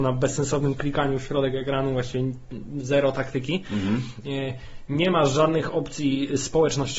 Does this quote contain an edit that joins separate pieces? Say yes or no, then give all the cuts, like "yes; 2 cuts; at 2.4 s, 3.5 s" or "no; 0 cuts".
no; 0 cuts